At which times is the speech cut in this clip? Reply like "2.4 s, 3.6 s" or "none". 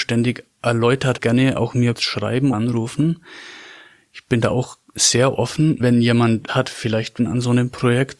1.2 s, 2.0 s, 2.5 s, 5.8 s, 6.5 s, 7.2 s